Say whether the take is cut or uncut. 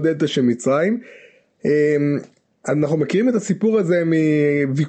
uncut